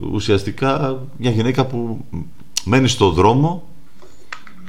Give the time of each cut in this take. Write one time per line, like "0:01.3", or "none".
none